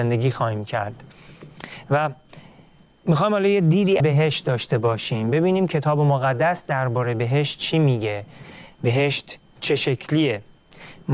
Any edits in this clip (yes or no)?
yes